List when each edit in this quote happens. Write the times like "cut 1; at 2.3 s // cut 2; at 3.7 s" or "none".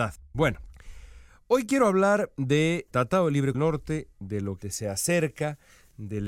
cut 1; at 2.9 s // cut 2; at 3.5 s // cut 3; at 4.6 s